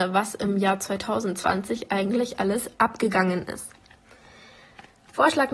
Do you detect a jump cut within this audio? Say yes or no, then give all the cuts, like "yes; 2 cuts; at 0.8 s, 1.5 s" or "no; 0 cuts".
no; 0 cuts